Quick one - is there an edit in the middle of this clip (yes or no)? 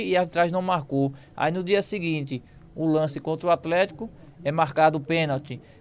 no